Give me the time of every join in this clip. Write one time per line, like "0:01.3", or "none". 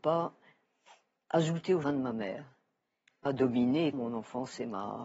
0:01.8
0:03.3
0:03.9

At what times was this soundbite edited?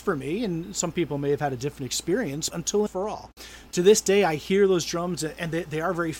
0:02.5
0:02.9

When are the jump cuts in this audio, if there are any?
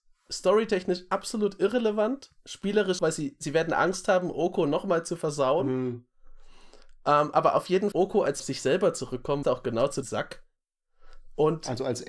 0:03.0
0:07.9
0:08.4
0:09.4
0:10.0

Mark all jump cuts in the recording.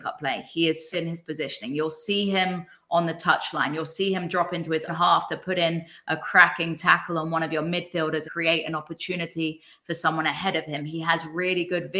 0:00.9
0:04.9
0:08.2

